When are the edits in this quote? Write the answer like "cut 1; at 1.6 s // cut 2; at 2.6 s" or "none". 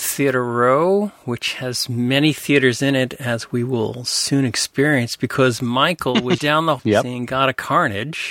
cut 1; at 6.4 s // cut 2; at 6.8 s